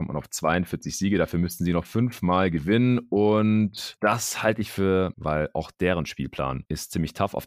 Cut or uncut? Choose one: cut